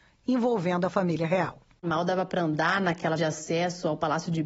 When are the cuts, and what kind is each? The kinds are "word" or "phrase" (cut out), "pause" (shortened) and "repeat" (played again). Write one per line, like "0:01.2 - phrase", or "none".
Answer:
0:03.2 - word